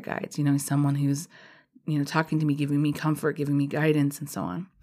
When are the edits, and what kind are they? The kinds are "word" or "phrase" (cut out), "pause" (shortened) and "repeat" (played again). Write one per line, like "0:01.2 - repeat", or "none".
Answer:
none

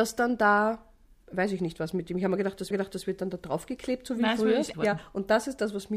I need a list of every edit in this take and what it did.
0:02.7 - repeat
0:04.7 - word

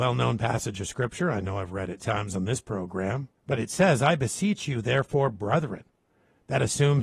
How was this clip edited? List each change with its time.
0:02.0 - word
0:03.4 - pause

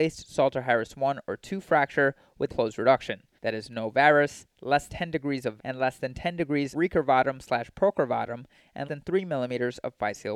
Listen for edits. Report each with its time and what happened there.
0:02.5 - word
0:03.4 - pause
0:04.9 - word
0:05.6 - word
0:06.7 - word
0:08.9 - word

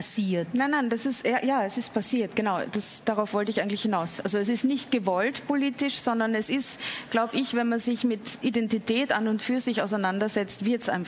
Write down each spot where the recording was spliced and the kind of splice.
none

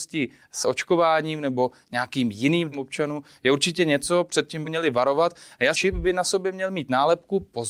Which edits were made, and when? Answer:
0:02.7 - word
0:04.6 - word
0:05.7 - phrase

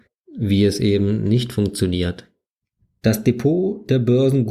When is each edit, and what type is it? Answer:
none

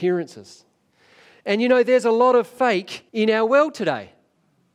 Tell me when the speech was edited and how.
0:03.1 - pause

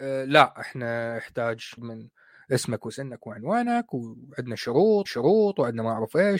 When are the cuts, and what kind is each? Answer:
0:01.8 - word
0:05.1 - repeat

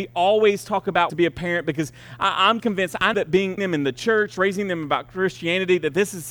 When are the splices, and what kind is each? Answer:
0:01.1 - phrase
0:02.6 - word
0:03.1 - word
0:03.6 - word

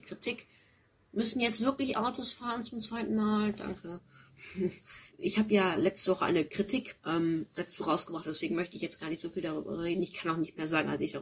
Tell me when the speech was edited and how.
0:05.1 - pause
0:07.0 - pause

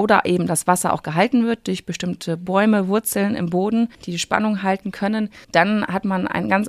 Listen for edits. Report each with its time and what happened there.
0:03.9 - pause
0:05.4 - pause

